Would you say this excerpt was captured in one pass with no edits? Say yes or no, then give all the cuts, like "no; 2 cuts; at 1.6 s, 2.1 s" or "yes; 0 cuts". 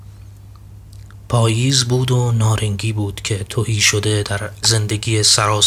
no; 2 cuts; at 3.5 s, 4.6 s